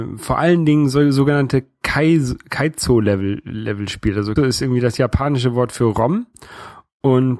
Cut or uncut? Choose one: cut